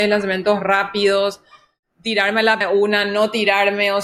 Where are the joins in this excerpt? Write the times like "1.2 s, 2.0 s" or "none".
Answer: 2.6 s